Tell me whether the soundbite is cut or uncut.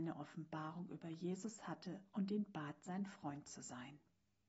uncut